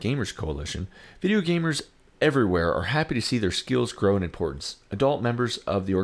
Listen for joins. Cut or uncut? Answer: uncut